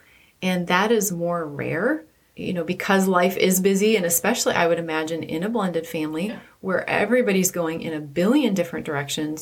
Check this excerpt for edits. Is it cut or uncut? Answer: uncut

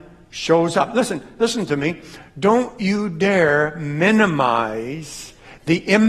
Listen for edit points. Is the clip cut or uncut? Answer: uncut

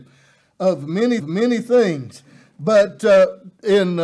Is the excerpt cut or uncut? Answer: cut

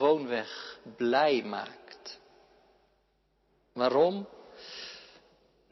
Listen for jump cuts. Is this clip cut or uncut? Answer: uncut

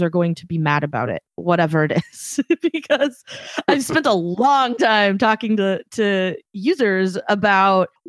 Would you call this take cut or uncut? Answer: uncut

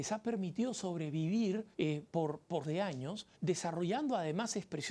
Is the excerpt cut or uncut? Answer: cut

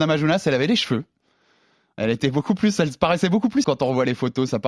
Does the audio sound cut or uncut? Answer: cut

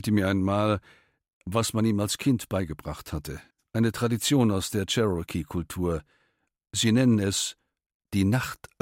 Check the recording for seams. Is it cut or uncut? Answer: cut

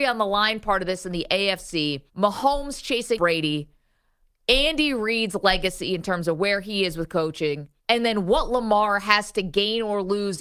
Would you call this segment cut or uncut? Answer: cut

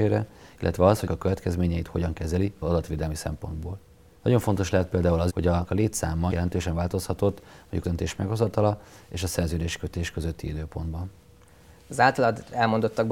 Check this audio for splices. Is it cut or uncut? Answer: cut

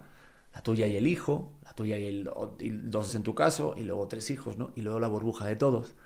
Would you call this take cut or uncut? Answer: cut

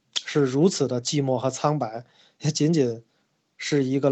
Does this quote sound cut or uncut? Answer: uncut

